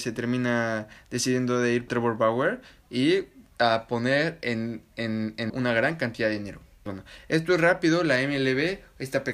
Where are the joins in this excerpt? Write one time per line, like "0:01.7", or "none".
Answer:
0:01.9
0:05.5
0:06.9

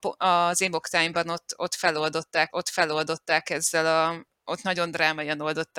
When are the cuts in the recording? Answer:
0:02.5
0:04.4

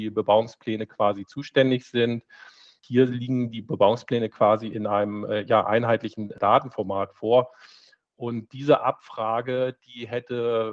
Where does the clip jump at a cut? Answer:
none

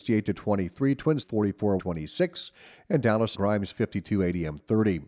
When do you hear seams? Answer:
0:01.2
0:01.8
0:03.3

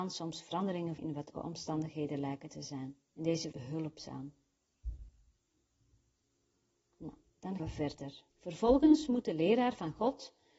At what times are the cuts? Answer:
0:01.0
0:01.3
0:03.1
0:03.5
0:07.6
0:08.3

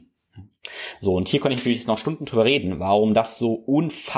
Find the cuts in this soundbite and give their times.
none

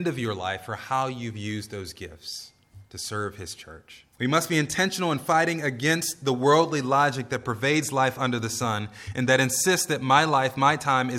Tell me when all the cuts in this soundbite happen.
0:02.9
0:04.1

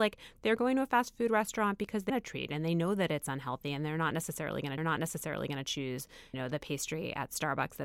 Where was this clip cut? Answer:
0:02.1
0:04.8
0:06.3

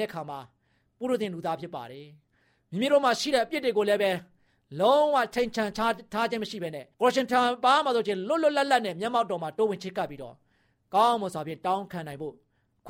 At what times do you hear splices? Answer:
0:06.9

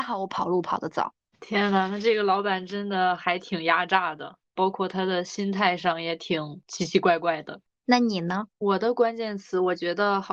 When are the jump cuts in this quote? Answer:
0:01.3
0:04.4
0:08.5

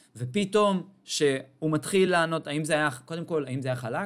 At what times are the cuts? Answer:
none

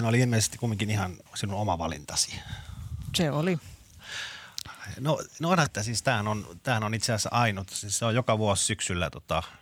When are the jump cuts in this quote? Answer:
0:01.3
0:05.7

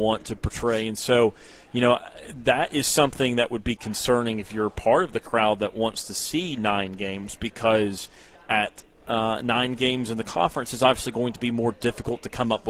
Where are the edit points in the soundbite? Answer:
none

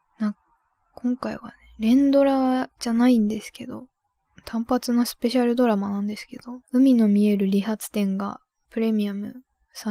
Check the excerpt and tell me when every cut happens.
0:06.6
0:08.6

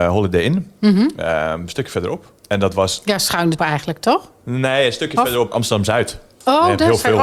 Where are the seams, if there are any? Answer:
0:02.4
0:03.6
0:05.5

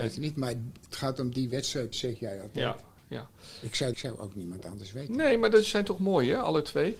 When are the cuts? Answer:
0:01.9
0:03.9

